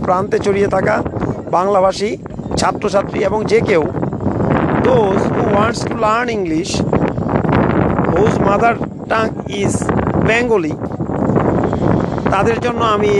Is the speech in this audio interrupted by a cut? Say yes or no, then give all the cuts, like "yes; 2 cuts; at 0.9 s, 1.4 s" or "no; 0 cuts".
no; 0 cuts